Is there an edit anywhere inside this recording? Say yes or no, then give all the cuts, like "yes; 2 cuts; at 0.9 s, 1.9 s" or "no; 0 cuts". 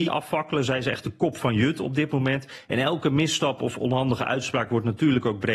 no; 0 cuts